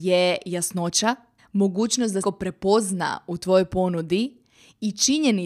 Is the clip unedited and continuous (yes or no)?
no